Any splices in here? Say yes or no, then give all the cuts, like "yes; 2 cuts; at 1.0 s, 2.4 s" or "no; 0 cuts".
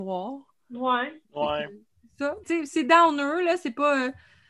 yes; 2 cuts; at 1.2 s, 2.4 s